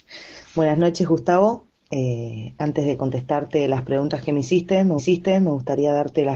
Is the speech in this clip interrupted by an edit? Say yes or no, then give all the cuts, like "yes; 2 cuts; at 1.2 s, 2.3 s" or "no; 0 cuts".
yes; 1 cut; at 5.0 s